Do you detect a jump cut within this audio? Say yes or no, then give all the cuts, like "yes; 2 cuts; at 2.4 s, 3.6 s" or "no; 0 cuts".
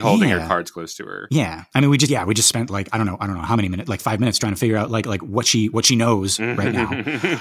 no; 0 cuts